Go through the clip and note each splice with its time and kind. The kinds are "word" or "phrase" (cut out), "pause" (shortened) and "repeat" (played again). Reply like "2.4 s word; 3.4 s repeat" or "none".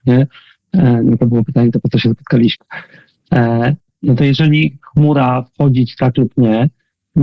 none

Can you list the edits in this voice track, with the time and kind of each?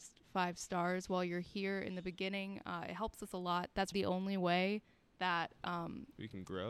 3.9 s word

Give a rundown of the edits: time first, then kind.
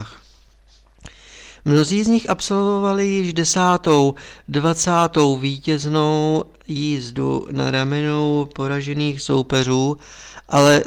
none

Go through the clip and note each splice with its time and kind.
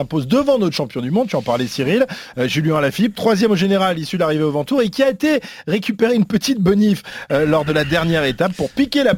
none

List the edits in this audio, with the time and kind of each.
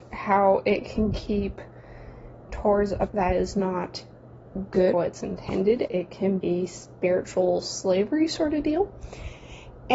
2.5 s word; 3.1 s word; 4.9 s word; 5.9 s word; 6.4 s word

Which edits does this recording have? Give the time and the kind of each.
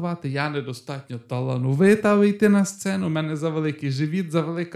none

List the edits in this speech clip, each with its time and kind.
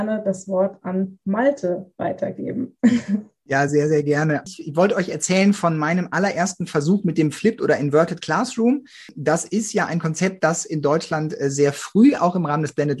none

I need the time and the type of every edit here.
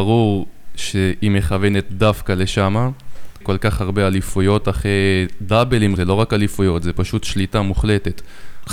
3.4 s word; 4.6 s word; 6.0 s word

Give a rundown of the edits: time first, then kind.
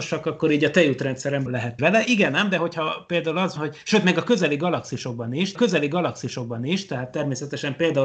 1.5 s phrase; 1.8 s phrase; 3.6 s word; 5.5 s repeat

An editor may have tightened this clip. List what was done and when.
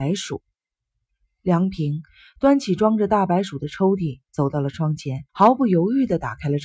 5.3 s pause

